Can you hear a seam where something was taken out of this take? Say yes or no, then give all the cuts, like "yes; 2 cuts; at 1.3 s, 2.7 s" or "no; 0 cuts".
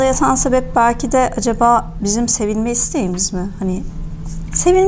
no; 0 cuts